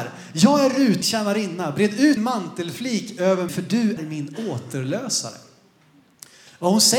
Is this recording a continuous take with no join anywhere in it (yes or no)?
no